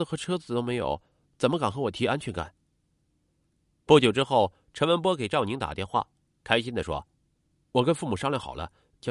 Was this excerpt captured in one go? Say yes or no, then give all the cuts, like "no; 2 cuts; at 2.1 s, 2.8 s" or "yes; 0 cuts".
no; 1 cut; at 7.1 s